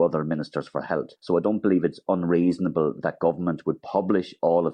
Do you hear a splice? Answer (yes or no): yes